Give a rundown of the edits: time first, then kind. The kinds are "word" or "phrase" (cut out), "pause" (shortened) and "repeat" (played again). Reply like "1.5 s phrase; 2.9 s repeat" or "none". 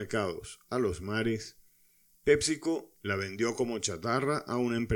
none